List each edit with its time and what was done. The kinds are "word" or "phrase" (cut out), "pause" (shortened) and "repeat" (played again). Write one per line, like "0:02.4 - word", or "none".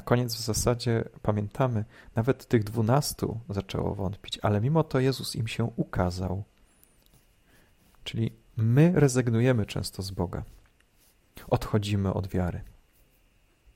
none

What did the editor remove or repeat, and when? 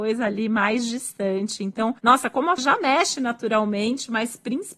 0:02.6 - word

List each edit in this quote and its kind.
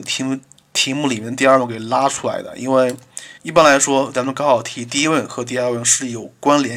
0:03.4 - pause

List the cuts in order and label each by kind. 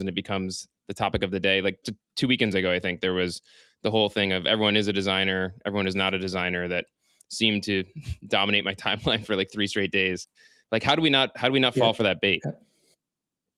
0:01.8 - word

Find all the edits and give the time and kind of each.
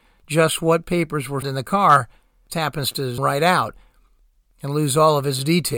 0:01.4 - word
0:02.5 - word
0:03.2 - word

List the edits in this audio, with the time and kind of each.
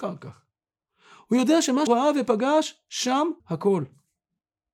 0:01.9 - word
0:03.4 - word

